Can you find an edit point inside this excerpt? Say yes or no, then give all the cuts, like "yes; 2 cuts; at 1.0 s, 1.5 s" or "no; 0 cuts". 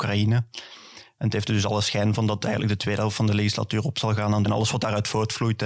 yes; 1 cut; at 4.5 s